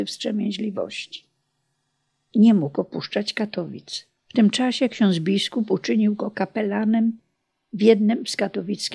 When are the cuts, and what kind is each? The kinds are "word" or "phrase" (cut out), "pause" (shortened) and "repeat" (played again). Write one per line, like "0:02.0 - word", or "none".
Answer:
0:04.2 - pause